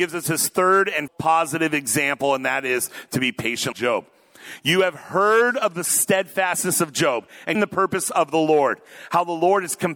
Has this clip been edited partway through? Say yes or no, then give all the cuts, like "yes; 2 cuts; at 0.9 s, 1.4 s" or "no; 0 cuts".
yes; 3 cuts; at 1.1 s, 3.7 s, 7.5 s